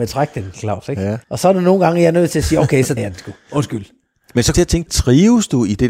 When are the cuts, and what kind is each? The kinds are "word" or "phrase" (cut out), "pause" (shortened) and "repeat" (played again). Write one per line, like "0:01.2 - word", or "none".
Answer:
0:01.2 - pause
0:03.0 - word
0:04.5 - phrase
0:04.9 - phrase